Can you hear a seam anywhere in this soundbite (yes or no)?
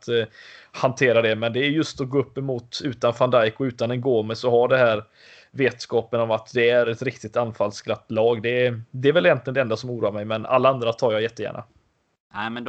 no